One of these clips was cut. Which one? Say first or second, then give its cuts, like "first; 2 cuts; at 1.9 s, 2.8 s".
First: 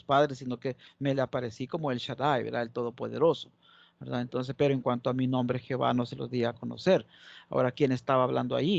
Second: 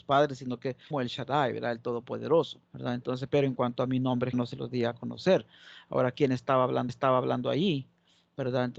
second; 4 cuts; at 0.9 s, 2.7 s, 4.3 s, 6.9 s